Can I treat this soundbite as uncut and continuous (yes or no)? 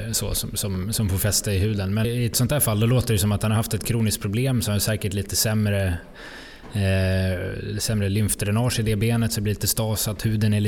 no